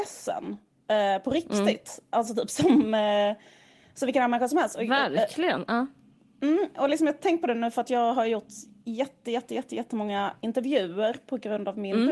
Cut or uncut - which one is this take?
uncut